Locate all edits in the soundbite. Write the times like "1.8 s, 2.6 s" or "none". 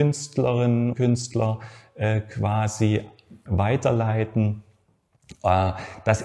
0.9 s, 3.5 s